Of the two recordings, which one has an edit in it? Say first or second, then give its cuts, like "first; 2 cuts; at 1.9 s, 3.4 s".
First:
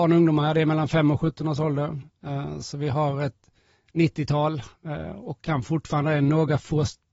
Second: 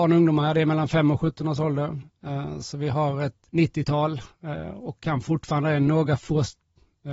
second; 1 cut; at 3.5 s